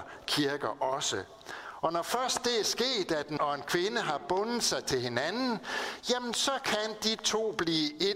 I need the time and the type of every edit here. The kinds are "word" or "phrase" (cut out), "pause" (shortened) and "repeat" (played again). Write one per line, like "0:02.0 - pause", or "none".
0:03.4 - word